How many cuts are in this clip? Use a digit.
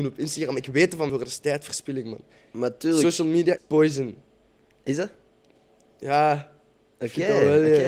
2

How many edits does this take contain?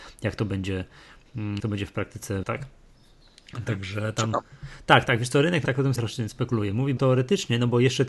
6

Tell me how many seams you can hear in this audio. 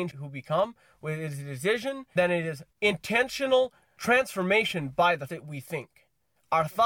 3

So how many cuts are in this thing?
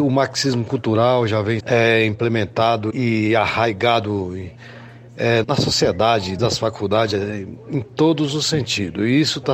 4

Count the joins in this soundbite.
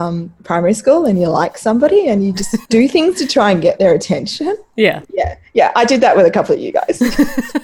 2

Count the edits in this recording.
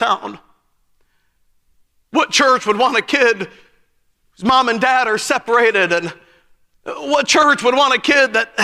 0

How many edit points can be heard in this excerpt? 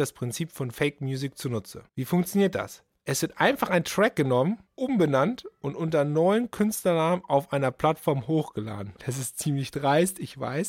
2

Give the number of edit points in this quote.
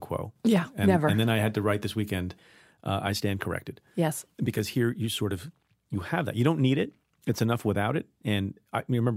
0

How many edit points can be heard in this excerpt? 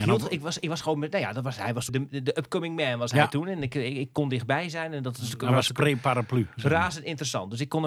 1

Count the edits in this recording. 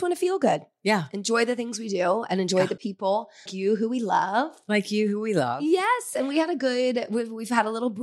1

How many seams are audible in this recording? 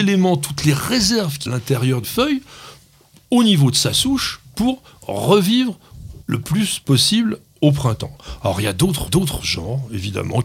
4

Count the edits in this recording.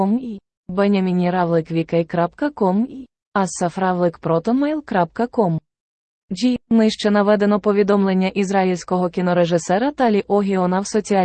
1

